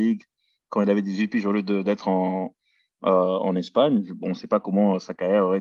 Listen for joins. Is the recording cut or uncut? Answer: uncut